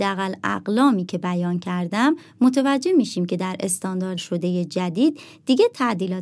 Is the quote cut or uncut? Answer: cut